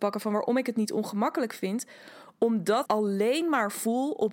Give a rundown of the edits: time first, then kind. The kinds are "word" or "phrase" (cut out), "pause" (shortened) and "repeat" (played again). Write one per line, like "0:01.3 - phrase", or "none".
0:02.8 - word